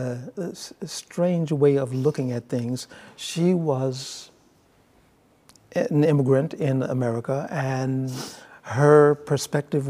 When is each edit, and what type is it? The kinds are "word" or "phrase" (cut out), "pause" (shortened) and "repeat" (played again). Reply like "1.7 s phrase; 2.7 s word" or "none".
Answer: none